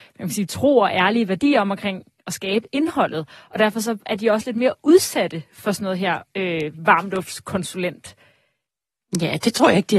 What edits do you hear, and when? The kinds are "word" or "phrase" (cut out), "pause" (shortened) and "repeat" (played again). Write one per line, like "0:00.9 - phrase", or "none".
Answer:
none

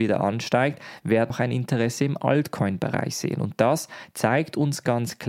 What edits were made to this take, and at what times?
0:01.3 - word

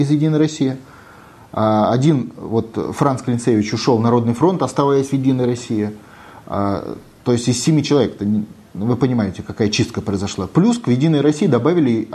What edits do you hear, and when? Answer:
none

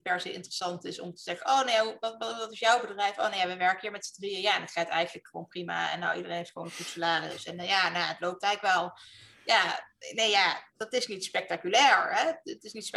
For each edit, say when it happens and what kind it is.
none

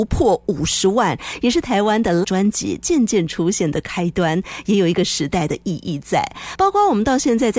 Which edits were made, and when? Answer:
0:02.2 - word

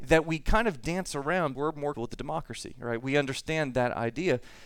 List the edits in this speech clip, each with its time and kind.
0:01.5 - word
0:01.9 - word

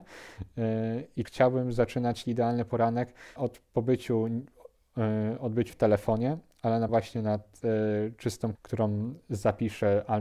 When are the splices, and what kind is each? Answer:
0:01.2 - word
0:02.2 - word
0:03.4 - word
0:05.7 - word
0:06.9 - word
0:08.5 - word

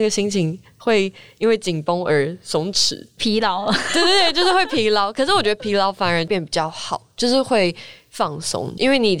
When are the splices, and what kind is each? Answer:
none

